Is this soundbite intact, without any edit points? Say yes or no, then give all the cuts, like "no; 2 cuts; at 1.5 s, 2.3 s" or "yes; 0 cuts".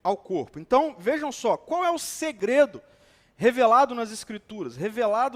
yes; 0 cuts